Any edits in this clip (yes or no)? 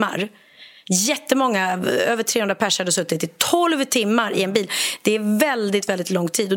no